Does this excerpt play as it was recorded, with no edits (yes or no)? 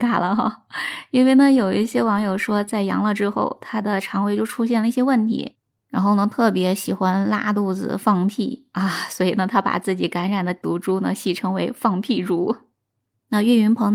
yes